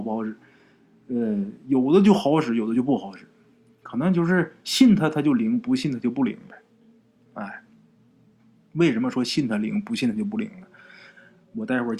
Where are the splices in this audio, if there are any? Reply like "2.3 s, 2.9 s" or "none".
none